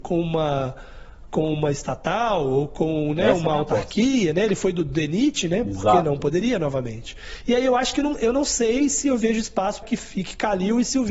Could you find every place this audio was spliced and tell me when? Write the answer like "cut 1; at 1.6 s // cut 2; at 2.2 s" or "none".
cut 1; at 9.8 s